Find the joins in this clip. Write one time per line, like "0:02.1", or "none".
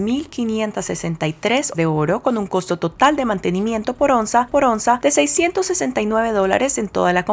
0:01.7
0:04.5